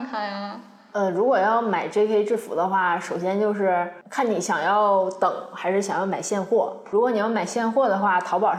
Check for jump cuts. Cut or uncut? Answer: uncut